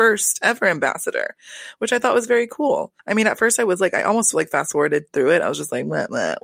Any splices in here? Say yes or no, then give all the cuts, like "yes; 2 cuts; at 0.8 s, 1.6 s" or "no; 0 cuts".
yes; 1 cut; at 3.0 s